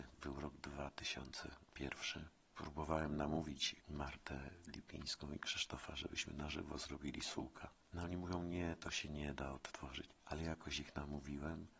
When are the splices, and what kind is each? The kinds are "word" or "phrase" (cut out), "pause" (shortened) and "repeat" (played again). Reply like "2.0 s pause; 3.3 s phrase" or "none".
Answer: none